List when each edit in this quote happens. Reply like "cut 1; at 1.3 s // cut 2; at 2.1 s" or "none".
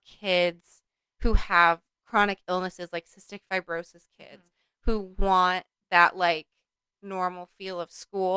none